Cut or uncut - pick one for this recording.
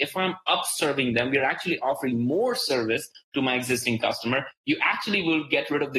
uncut